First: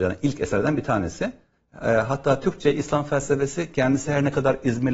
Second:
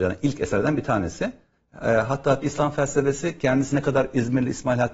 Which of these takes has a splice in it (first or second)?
second